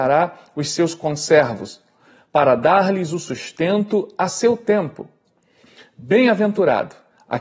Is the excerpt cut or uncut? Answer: uncut